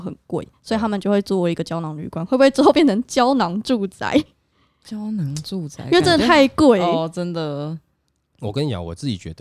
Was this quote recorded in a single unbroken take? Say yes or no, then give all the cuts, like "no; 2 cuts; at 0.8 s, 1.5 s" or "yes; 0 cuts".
yes; 0 cuts